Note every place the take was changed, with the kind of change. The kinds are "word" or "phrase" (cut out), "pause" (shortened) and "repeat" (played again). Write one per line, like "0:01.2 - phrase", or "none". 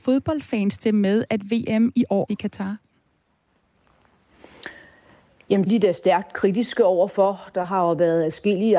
0:02.3 - word
0:05.7 - word